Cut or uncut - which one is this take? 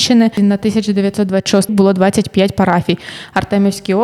cut